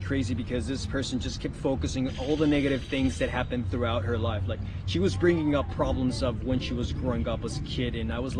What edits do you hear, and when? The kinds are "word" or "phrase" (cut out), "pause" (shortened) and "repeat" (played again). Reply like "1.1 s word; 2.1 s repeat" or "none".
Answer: none